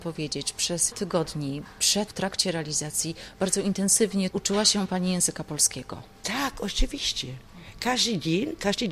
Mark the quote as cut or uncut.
cut